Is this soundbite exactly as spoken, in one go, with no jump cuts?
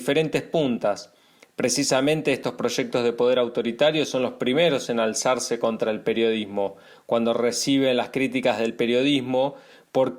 yes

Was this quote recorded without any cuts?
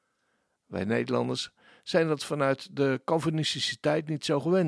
yes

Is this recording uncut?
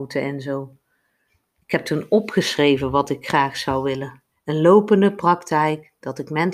no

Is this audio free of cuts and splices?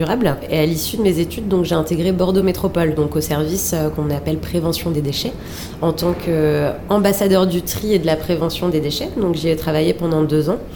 yes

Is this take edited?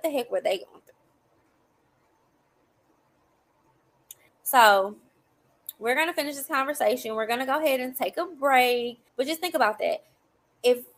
yes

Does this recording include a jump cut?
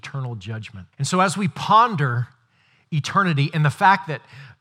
yes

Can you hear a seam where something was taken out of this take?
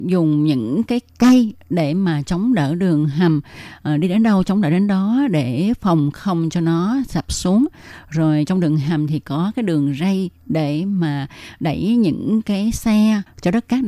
no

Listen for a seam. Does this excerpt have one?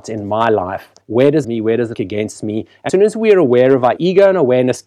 yes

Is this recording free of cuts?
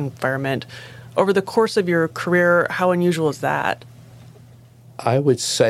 yes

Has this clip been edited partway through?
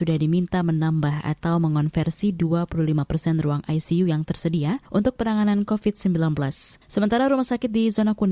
yes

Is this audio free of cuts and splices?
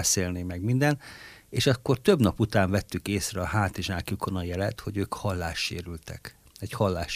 yes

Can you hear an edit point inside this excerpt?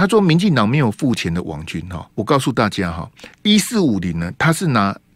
yes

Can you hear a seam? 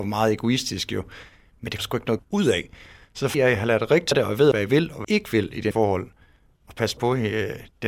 yes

